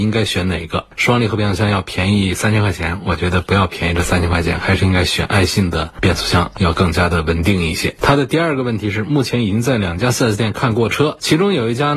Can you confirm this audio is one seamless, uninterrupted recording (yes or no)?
yes